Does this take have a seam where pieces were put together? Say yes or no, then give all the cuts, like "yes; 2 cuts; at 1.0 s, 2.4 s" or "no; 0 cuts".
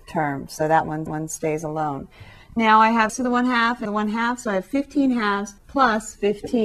yes; 4 cuts; at 1.1 s, 3.1 s, 3.9 s, 5.6 s